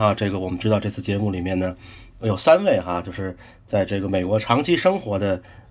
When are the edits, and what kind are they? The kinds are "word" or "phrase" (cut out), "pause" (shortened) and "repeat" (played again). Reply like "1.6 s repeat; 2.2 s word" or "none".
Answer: none